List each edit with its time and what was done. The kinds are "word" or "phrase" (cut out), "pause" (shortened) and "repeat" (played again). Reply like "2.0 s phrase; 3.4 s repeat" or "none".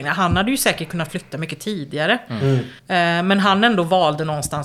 2.8 s pause